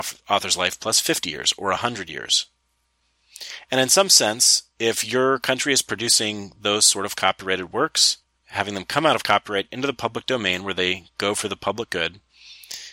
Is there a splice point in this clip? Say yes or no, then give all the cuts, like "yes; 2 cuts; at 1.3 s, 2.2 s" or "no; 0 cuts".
yes; 1 cut; at 8.2 s